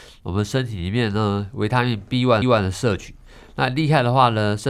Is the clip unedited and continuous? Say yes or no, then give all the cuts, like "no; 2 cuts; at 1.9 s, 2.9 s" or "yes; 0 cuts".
no; 1 cut; at 2.4 s